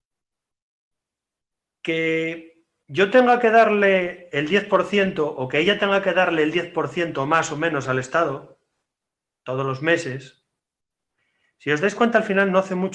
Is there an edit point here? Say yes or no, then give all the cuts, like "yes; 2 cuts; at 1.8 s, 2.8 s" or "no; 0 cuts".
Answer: no; 0 cuts